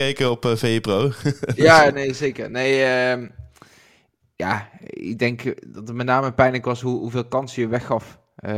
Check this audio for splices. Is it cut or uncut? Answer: uncut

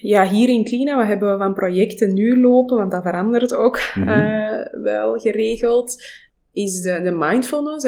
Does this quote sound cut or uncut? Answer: uncut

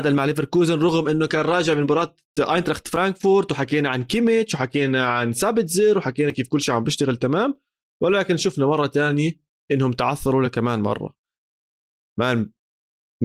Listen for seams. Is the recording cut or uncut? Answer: uncut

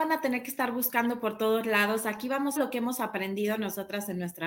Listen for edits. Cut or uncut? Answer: cut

